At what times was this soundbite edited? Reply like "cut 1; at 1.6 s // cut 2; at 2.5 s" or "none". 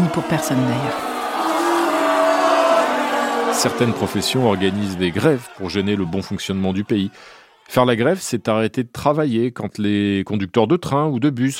none